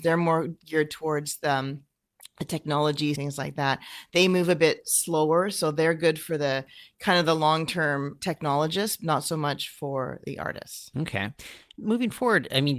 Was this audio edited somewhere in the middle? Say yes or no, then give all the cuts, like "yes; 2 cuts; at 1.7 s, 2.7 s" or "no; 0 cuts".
yes; 3 cuts; at 3.2 s, 8.2 s, 10.2 s